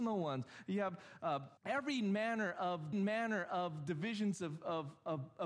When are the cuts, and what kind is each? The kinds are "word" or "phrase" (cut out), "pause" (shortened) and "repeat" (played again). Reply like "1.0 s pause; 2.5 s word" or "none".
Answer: 1.6 s pause; 2.9 s repeat